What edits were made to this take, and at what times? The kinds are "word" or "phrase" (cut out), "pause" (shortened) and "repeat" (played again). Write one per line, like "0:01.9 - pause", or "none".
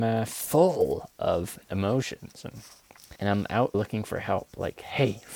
0:01.6 - pause
0:03.2 - pause
0:03.7 - word